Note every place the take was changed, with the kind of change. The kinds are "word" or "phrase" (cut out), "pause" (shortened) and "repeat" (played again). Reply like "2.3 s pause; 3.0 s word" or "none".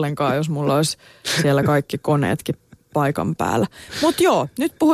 none